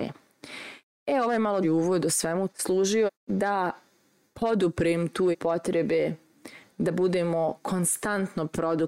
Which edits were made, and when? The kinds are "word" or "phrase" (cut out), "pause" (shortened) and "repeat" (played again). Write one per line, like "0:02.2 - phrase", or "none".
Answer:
0:01.6 - word
0:02.5 - word
0:03.1 - word
0:05.3 - word